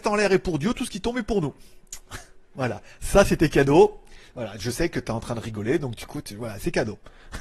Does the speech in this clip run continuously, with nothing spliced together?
yes; 0 cuts

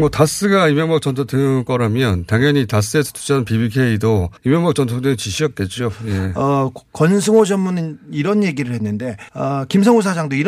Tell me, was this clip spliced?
yes; 2 cuts; at 4.4 s, 9.3 s

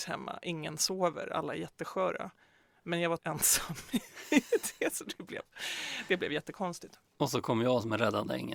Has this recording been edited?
yes; 1 cut; at 3.2 s

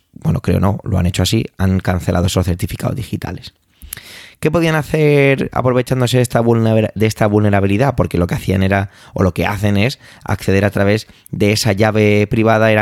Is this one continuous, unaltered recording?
yes; 0 cuts

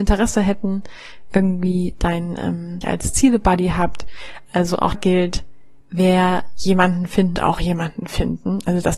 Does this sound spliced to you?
yes; 4 cuts; at 2.8 s, 4.9 s, 5.8 s, 7.4 s

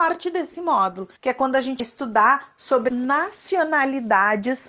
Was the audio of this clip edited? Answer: yes; 3 cuts; at 1.2 s, 1.8 s, 2.9 s

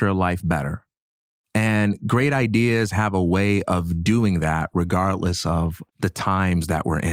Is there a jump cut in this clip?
yes; 1 cut; at 5.9 s

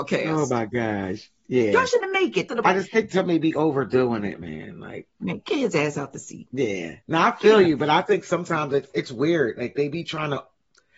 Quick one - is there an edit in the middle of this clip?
yes; 4 cuts; at 1.4 s, 2.0 s, 2.5 s, 7.0 s

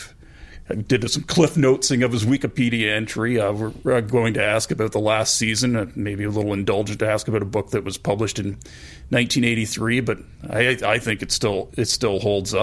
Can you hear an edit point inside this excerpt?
no; 0 cuts

